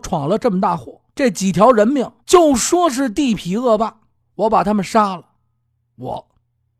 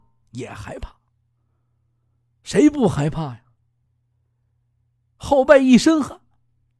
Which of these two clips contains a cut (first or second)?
first